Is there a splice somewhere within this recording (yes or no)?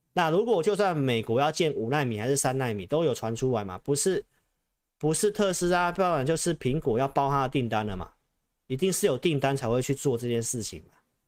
no